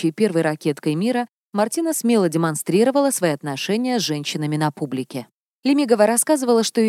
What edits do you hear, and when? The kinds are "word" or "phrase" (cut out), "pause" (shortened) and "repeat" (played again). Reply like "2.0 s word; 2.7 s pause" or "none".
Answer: none